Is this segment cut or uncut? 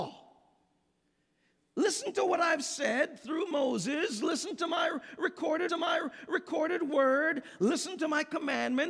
cut